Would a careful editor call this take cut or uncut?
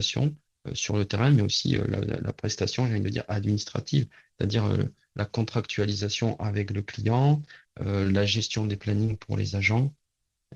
uncut